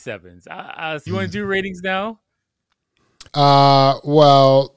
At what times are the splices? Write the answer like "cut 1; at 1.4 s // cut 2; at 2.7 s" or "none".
cut 1; at 1.1 s // cut 2; at 3.3 s